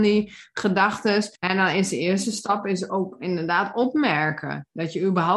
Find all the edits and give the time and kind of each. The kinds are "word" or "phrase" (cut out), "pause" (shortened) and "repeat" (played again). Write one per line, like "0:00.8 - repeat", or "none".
0:01.4 - pause